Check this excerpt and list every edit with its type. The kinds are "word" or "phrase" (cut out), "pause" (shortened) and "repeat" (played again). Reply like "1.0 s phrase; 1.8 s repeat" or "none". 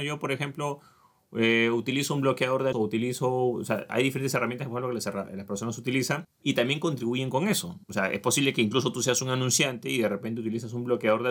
2.7 s word; 7.8 s pause

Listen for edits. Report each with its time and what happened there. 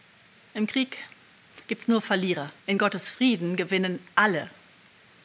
1.6 s pause; 2.6 s pause

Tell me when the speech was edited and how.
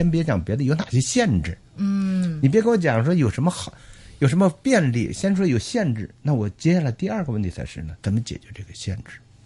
8.0 s pause

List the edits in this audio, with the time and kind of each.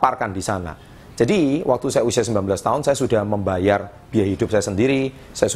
none

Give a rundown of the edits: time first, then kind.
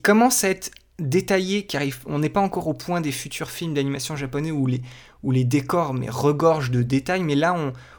none

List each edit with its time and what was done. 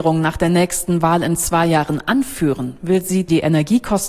none

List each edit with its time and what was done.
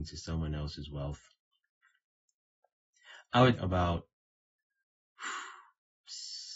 3.6 s word

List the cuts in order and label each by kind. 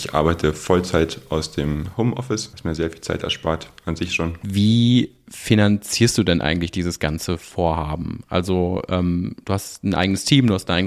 none

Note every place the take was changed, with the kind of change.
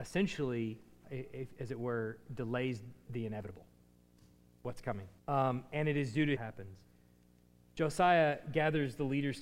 1.0 s word; 3.1 s word; 5.2 s pause; 6.4 s phrase

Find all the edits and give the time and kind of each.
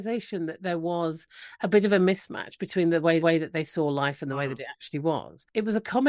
3.2 s repeat

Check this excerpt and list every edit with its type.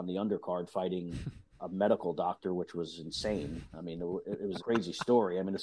1.6 s word; 4.6 s word

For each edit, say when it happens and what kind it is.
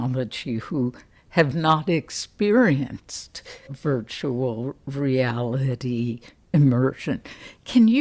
3.7 s word

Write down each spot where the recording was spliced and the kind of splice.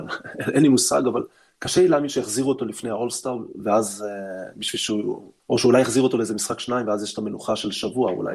1.5 s pause; 5.4 s pause

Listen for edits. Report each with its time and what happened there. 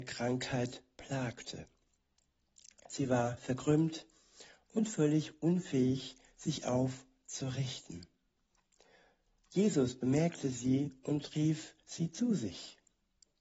none

